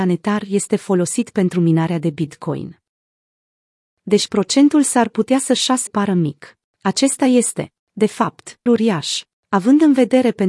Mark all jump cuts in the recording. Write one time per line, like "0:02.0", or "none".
0:05.9
0:08.7